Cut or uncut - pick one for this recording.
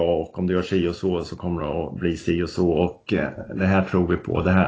uncut